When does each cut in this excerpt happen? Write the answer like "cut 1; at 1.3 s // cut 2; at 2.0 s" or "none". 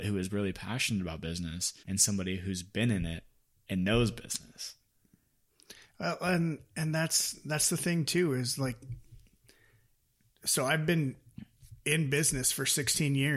cut 1; at 1.8 s